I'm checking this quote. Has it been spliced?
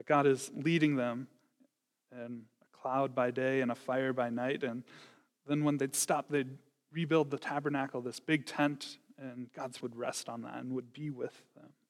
yes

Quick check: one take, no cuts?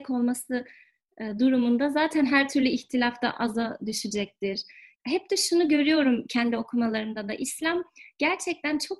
yes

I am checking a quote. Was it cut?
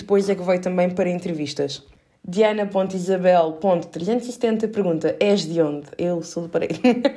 no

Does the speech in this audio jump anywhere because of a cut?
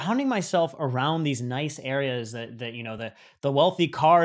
no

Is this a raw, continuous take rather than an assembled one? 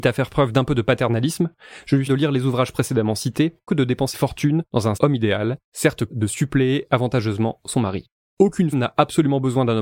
no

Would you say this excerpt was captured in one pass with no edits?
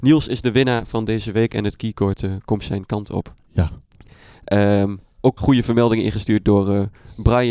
no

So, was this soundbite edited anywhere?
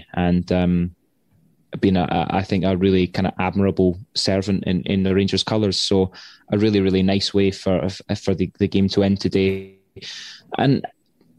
no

